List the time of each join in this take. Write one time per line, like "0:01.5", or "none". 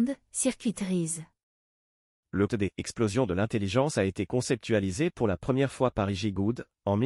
0:02.5